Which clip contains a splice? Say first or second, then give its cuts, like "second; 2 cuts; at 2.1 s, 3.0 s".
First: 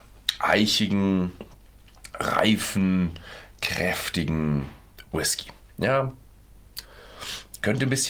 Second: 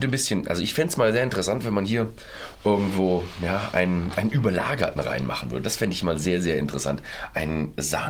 first; 1 cut; at 5.6 s